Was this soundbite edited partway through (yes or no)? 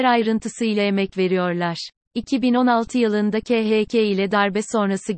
yes